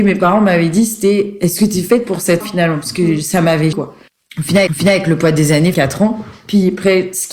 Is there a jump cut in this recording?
yes; 5 cuts; at 2.4 s, 3.7 s, 4.1 s, 4.7 s, 5.7 s

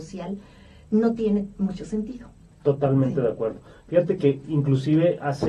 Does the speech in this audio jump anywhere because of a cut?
no; 0 cuts

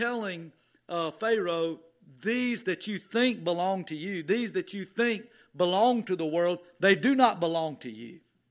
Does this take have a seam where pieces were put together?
no; 0 cuts

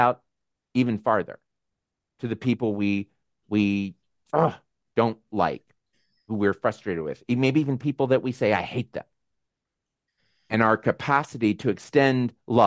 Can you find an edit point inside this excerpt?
no; 0 cuts

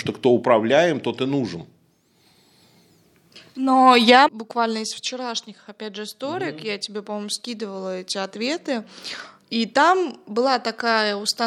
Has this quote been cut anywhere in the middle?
yes; 1 cut; at 4.3 s

